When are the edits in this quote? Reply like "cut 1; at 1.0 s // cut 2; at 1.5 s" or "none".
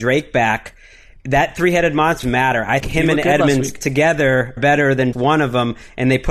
cut 1; at 2.2 s // cut 2; at 2.8 s // cut 3; at 4.6 s // cut 4; at 5.1 s